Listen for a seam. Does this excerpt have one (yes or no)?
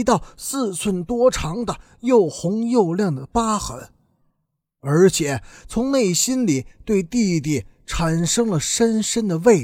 no